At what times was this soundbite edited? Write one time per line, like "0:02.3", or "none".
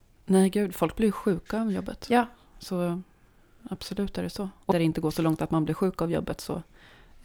0:04.7